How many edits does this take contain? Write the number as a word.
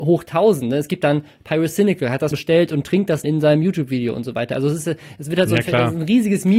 two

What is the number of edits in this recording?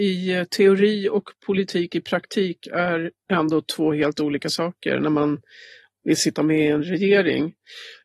zero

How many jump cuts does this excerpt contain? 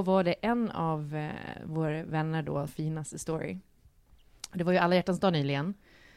one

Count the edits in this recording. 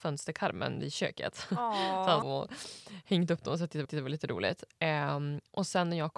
two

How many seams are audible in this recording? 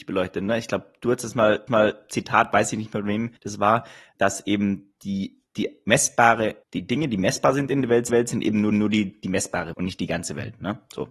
eight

